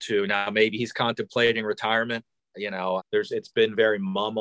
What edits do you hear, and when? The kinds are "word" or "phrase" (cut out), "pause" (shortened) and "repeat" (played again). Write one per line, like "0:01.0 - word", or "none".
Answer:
0:03.0 - word